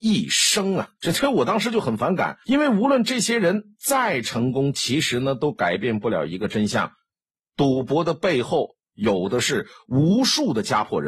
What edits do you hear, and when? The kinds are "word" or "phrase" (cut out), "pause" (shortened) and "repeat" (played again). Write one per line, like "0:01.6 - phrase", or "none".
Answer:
0:00.9 - pause
0:02.4 - pause